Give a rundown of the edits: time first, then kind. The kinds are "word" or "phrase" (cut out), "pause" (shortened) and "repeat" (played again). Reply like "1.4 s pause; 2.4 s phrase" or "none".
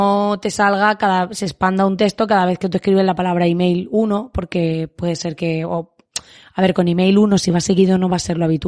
none